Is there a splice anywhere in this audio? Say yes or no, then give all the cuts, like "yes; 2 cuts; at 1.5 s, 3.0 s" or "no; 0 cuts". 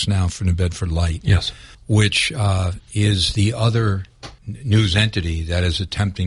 yes; 2 cuts; at 1.7 s, 4.4 s